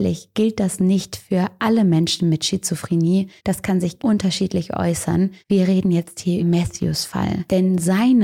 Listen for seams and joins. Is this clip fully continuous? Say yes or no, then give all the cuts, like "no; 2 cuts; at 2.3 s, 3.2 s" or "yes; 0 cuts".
no; 4 cuts; at 3.4 s, 4.0 s, 5.4 s, 6.4 s